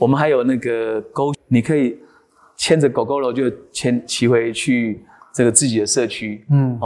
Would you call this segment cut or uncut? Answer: cut